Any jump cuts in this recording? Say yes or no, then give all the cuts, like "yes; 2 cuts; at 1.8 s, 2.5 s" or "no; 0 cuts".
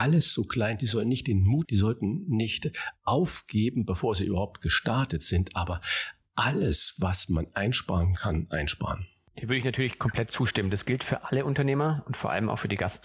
yes; 2 cuts; at 1.6 s, 9.3 s